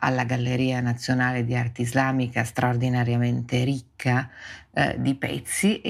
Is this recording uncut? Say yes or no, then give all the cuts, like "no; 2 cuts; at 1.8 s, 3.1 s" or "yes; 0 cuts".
yes; 0 cuts